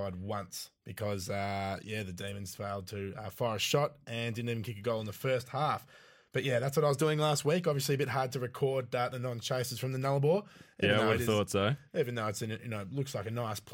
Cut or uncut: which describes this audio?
uncut